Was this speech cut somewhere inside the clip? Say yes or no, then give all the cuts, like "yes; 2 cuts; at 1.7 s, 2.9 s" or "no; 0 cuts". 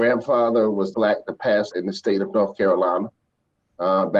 yes; 2 cuts; at 0.9 s, 1.7 s